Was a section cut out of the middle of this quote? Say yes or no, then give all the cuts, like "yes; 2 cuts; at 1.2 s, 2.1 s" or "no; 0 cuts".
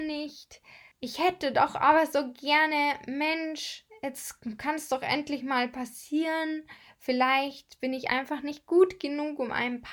no; 0 cuts